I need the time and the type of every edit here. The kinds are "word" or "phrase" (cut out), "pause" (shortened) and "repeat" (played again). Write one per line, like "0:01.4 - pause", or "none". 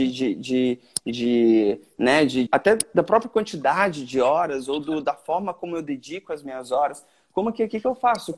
0:02.5 - word